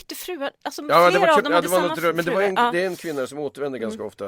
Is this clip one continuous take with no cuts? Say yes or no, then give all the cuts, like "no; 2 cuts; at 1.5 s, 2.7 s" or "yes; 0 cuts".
yes; 0 cuts